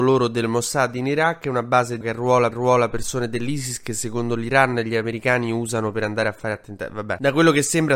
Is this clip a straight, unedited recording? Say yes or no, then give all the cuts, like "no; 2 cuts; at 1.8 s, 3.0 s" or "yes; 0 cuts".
no; 2 cuts; at 2.0 s, 2.5 s